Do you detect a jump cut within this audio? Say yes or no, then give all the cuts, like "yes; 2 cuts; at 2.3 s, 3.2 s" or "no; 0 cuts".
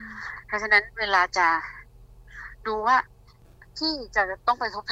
no; 0 cuts